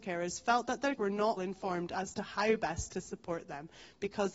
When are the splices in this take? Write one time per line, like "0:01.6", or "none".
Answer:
0:01.0
0:01.4